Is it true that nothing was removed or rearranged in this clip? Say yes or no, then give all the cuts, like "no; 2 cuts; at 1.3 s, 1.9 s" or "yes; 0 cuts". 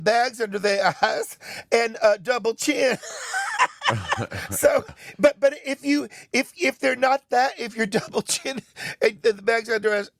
yes; 0 cuts